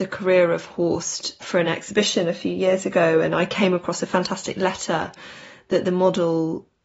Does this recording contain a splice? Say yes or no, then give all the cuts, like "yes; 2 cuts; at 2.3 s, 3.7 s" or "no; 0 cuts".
no; 0 cuts